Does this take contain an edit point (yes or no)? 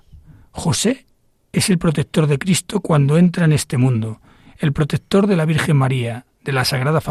no